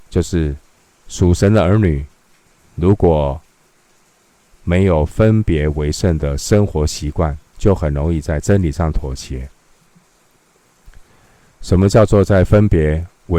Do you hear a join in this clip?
yes; 2 cuts; at 2.5 s, 7.5 s

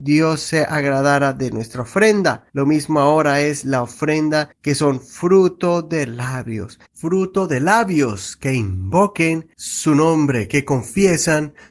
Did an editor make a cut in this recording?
yes; 4 cuts; at 2.5 s, 4.5 s, 6.9 s, 9.5 s

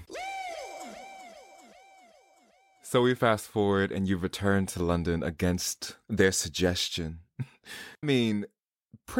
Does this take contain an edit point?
yes; 2 cuts; at 6.0 s, 8.0 s

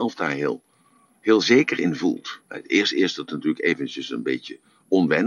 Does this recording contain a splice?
yes; 1 cut; at 2.4 s

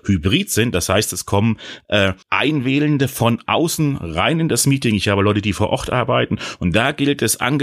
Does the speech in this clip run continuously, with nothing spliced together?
no; 1 cut; at 2.2 s

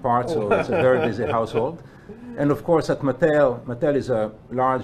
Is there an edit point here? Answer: no; 0 cuts

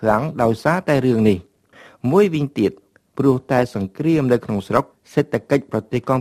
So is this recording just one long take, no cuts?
no; 1 cut; at 4.9 s

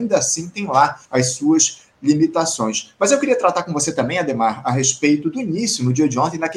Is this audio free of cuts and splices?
no; 1 cut; at 1.1 s

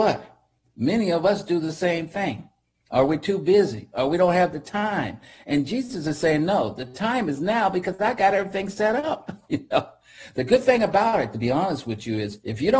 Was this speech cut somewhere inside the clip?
no; 0 cuts

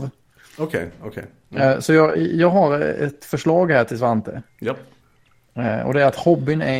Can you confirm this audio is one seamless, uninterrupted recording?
yes; 0 cuts

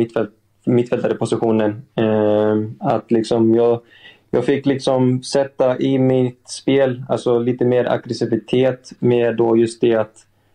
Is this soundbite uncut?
yes; 0 cuts

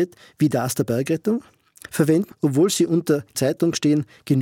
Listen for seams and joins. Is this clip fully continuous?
no; 2 cuts; at 2.3 s, 3.3 s

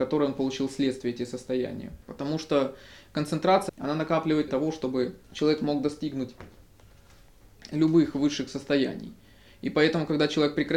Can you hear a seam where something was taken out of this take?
yes; 4 cuts; at 2.0 s, 3.7 s, 4.5 s, 5.2 s

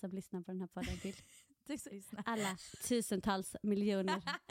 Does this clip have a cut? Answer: yes; 1 cut; at 1.9 s

